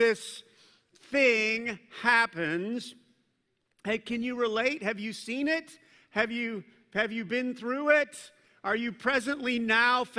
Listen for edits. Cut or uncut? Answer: uncut